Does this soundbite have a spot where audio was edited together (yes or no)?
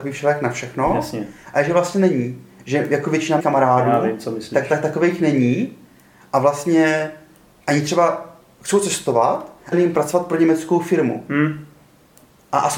yes